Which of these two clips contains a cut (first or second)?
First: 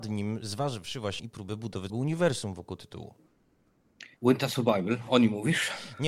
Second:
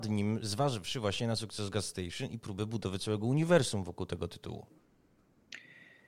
first